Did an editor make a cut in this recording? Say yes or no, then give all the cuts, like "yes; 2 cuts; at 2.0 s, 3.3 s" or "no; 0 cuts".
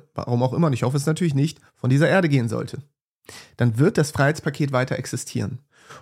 no; 0 cuts